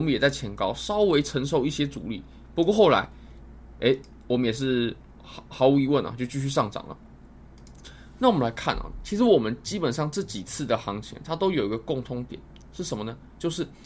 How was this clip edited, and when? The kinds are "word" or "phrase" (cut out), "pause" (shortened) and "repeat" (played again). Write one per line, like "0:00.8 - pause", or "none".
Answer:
none